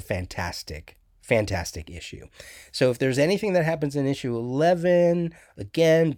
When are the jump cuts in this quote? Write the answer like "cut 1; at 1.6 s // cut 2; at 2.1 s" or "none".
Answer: none